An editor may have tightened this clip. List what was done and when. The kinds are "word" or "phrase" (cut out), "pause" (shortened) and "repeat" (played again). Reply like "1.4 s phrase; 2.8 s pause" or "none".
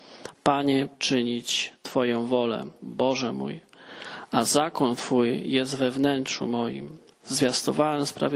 0.9 s word

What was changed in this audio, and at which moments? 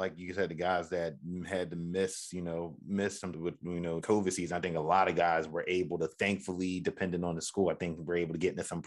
3.3 s phrase; 4.0 s phrase

